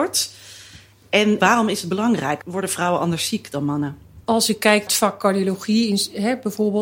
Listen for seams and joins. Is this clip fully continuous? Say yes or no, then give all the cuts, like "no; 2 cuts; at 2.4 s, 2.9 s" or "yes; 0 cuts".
no; 3 cuts; at 1.4 s, 4.2 s, 4.9 s